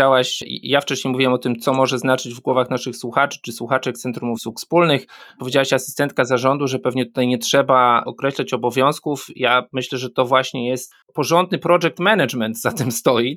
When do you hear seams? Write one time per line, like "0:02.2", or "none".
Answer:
0:11.0

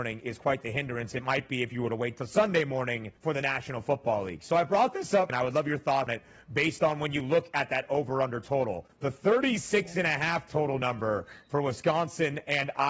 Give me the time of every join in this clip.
0:03.2
0:05.3
0:06.1
0:08.9

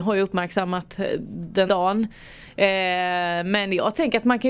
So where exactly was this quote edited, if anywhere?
0:01.7

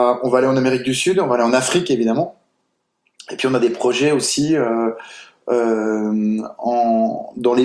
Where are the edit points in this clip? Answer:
none

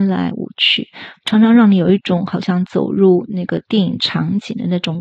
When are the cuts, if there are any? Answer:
none

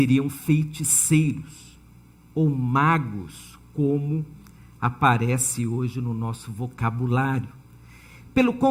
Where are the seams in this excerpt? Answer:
none

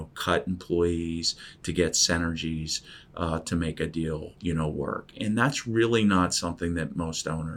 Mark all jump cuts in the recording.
0:04.4

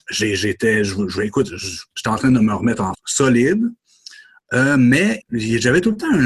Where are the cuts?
0:02.9
0:05.2

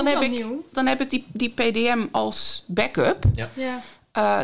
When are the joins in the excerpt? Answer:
0:01.1

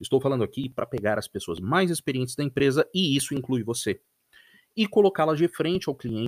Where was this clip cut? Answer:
none

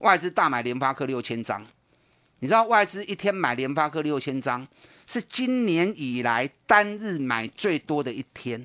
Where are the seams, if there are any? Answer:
none

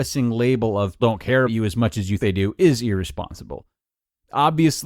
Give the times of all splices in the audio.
0:01.0
0:01.5
0:02.2

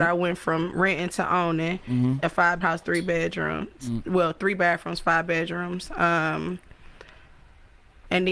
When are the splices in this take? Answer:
0:02.6

